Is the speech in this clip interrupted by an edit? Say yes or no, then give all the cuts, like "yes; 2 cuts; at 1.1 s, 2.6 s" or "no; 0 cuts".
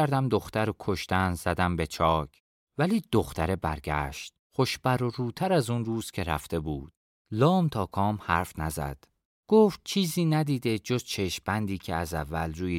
no; 0 cuts